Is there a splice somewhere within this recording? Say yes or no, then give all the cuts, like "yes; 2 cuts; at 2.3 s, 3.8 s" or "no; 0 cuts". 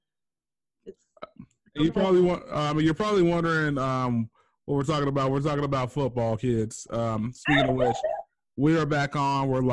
no; 0 cuts